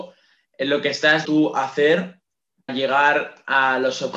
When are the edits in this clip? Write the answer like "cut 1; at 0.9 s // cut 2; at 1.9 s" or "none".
cut 1; at 1.2 s // cut 2; at 2.7 s